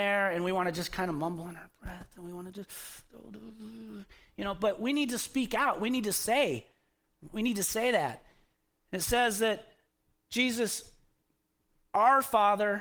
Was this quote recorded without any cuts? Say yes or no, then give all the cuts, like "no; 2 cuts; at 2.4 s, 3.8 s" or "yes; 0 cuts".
yes; 0 cuts